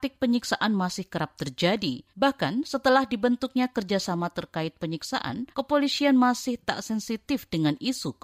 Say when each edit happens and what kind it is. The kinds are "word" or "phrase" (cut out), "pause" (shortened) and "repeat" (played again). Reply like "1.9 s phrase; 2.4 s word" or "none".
2.1 s pause; 5.5 s pause